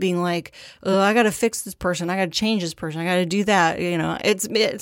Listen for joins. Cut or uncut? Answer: uncut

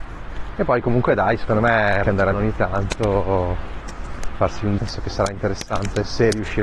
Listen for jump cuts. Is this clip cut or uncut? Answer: cut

